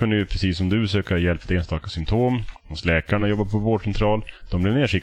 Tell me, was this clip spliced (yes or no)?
no